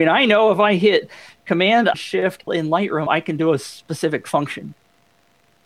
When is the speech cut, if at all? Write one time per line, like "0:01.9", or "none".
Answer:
0:01.9
0:02.5
0:03.1